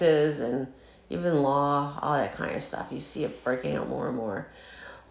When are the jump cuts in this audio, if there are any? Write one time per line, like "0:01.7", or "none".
none